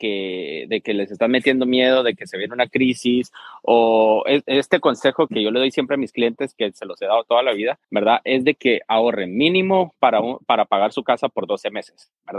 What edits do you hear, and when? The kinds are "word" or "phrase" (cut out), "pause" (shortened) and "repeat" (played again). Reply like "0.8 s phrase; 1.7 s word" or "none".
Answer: 5.3 s word; 7.8 s pause